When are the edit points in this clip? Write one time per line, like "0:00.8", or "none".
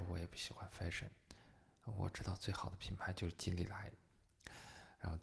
none